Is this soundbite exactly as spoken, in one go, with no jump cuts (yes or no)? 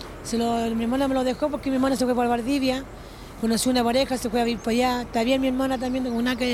yes